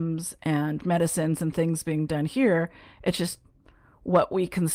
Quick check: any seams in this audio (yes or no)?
no